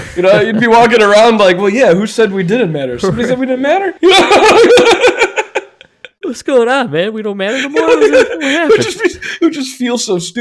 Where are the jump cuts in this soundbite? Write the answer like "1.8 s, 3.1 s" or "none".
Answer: 4.0 s